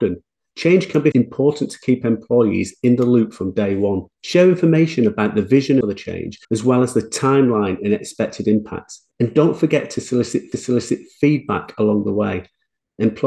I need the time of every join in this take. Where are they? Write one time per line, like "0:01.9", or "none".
0:01.1
0:04.1
0:05.8
0:06.4
0:09.1
0:10.5